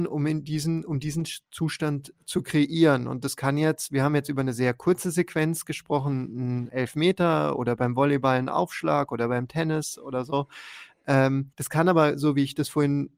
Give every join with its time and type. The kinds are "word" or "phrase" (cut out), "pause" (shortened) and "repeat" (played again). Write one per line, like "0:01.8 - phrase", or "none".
0:06.7 - word
0:11.5 - pause